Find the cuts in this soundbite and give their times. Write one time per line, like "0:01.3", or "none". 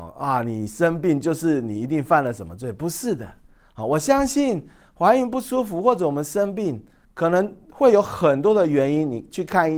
0:07.0